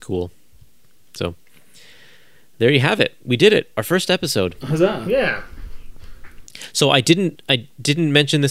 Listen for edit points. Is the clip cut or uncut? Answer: uncut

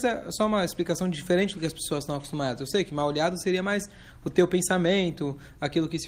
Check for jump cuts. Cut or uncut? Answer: uncut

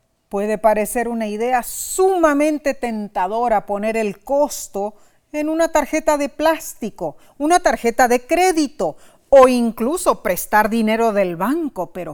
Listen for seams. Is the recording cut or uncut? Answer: uncut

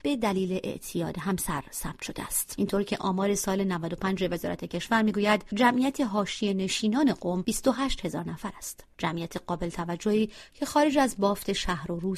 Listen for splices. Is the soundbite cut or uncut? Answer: uncut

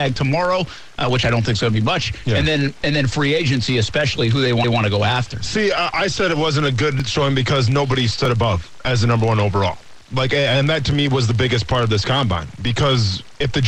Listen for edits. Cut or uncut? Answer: cut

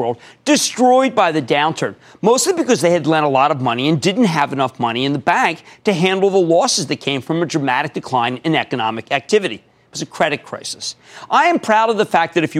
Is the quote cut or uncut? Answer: uncut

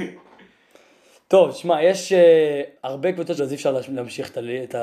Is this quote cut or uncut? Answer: cut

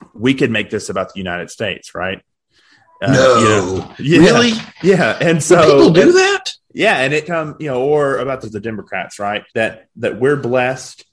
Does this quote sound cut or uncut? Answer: cut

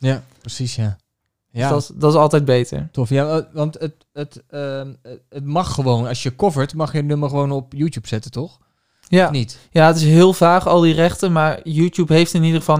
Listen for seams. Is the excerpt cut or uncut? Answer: uncut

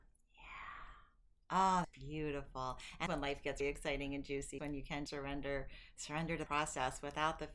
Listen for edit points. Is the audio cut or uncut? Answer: cut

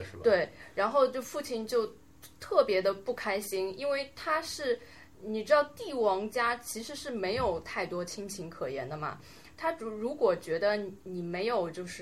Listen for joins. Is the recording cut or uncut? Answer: cut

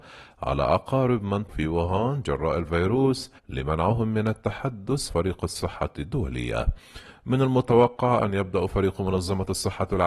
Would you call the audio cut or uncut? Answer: cut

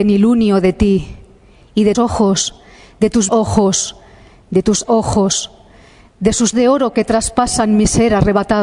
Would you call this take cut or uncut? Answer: cut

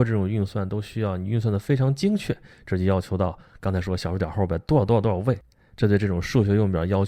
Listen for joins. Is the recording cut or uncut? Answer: uncut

